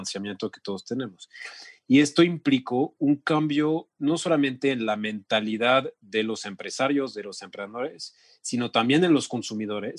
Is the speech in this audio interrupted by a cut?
no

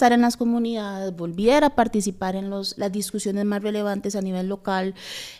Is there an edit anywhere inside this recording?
yes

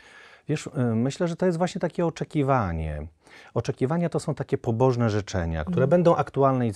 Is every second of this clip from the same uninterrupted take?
yes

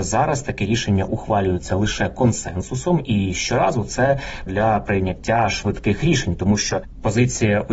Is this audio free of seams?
no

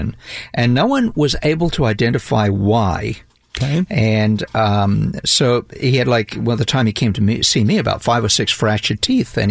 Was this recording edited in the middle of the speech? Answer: no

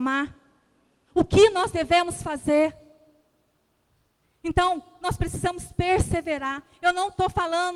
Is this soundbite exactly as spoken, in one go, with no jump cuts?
yes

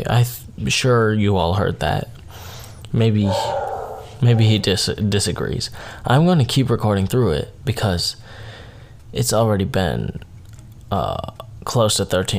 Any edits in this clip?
no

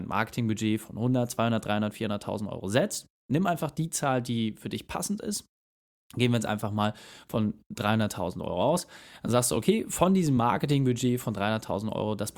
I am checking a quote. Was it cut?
no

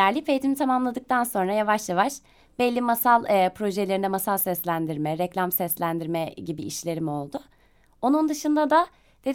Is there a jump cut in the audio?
no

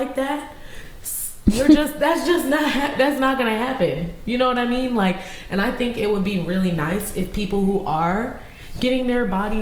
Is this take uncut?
yes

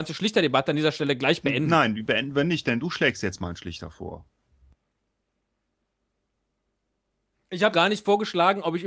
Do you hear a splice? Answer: yes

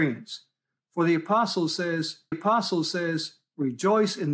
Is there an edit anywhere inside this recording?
yes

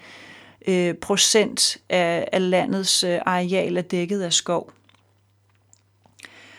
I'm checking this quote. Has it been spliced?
no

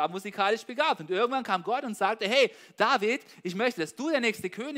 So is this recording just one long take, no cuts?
yes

